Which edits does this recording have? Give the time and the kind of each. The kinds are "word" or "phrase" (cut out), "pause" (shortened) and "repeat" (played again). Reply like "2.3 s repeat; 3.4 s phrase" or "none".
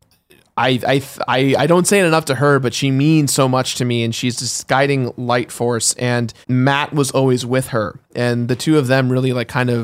6.4 s pause